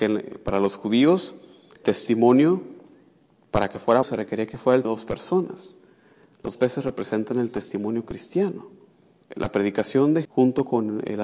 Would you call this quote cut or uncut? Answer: cut